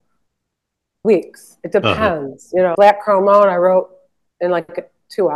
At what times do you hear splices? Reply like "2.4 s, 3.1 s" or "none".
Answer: 1.0 s, 2.7 s